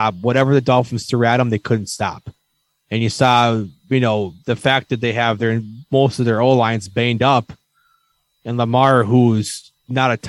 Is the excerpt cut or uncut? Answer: uncut